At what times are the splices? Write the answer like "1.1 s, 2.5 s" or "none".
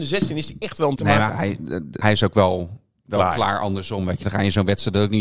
1.0 s, 1.3 s, 2.0 s